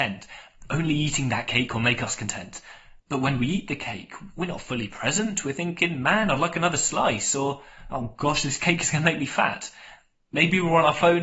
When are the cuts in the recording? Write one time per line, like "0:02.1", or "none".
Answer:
0:03.0